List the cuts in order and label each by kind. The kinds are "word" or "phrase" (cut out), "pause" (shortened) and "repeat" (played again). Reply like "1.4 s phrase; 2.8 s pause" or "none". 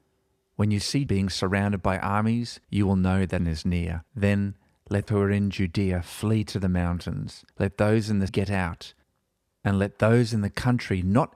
1.1 s word; 2.6 s pause; 3.4 s phrase; 4.1 s pause; 5.1 s word; 7.5 s pause; 8.3 s word